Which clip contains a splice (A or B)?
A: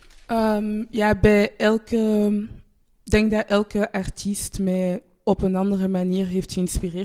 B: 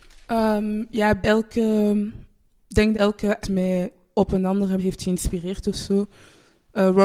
B